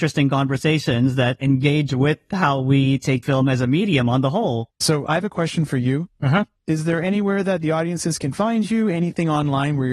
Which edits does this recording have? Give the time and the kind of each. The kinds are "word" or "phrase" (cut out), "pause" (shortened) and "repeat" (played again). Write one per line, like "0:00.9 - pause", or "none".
0:03.2 - word
0:04.7 - pause